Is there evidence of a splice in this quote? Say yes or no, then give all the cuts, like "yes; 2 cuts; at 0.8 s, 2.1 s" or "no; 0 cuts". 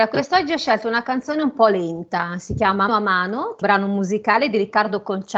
yes; 2 cuts; at 2.9 s, 3.6 s